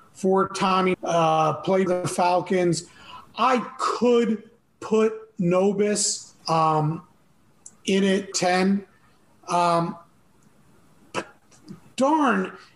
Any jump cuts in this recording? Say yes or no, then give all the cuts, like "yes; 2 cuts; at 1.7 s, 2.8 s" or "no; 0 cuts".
yes; 5 cuts; at 0.9 s, 1.9 s, 4.6 s, 6.4 s, 8.3 s